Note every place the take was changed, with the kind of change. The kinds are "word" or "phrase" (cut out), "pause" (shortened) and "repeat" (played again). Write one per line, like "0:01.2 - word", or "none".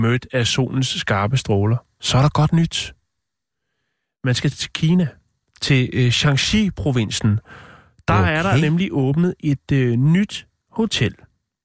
0:04.5 - word